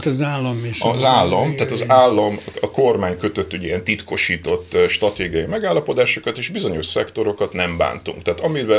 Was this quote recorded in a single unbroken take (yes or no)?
yes